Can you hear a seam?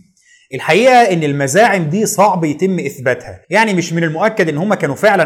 yes; 1 cut; at 3.4 s

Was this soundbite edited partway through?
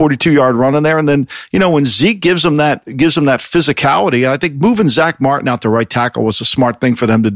no; 0 cuts

